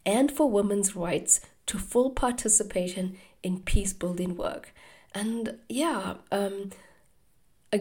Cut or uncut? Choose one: uncut